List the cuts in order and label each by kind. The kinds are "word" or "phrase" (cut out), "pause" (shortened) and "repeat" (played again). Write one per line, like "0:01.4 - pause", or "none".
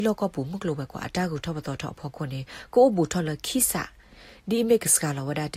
none